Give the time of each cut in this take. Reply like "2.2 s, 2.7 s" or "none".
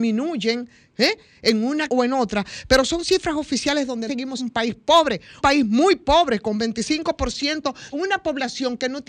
1.9 s, 4.1 s, 4.4 s, 5.4 s, 7.9 s